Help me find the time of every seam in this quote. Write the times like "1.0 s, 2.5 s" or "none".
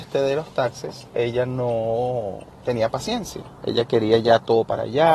none